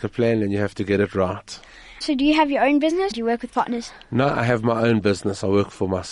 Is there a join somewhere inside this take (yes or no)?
yes